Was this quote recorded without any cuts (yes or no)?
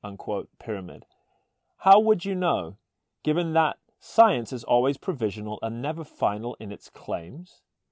yes